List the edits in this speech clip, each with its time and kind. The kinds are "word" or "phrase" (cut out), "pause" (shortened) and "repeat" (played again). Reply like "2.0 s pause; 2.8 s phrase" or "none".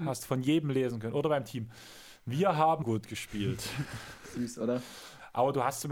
2.8 s phrase